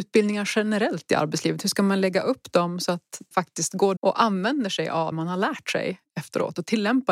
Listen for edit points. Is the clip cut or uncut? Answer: cut